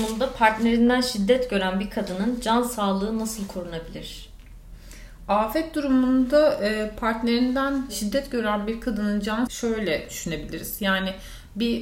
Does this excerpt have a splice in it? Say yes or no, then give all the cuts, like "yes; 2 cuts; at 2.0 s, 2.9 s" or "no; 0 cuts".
yes; 1 cut; at 9.5 s